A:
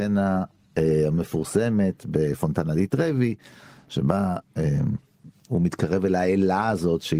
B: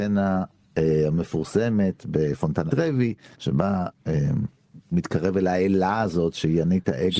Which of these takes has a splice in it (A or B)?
B